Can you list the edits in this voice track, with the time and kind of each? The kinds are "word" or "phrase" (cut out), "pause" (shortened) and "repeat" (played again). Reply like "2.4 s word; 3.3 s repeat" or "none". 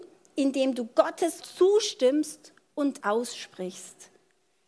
1.4 s word; 3.0 s word